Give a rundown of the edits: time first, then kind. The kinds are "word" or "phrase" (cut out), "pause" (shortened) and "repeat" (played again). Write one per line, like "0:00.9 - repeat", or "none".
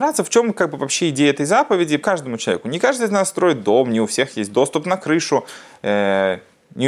0:02.0 - word